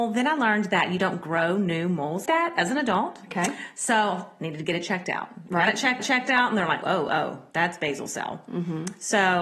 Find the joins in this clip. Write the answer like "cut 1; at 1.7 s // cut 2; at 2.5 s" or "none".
cut 1; at 2.3 s // cut 2; at 6.0 s // cut 3; at 6.8 s